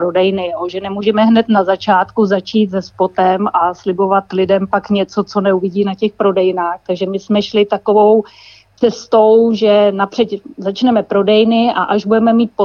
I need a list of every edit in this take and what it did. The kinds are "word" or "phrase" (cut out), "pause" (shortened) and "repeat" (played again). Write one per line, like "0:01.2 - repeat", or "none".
none